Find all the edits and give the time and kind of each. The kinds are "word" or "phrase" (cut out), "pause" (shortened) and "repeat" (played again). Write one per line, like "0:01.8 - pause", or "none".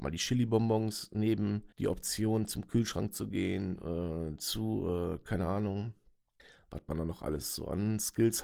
0:01.7 - pause
0:06.4 - pause